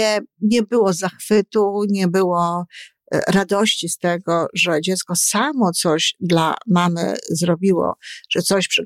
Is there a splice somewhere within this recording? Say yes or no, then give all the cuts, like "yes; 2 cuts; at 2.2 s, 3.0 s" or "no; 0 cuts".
no; 0 cuts